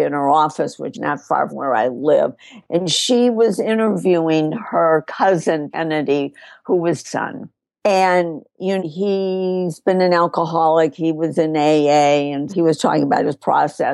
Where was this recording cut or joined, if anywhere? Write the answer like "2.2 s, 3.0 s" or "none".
0.9 s, 1.5 s, 5.7 s, 7.0 s, 8.8 s, 12.5 s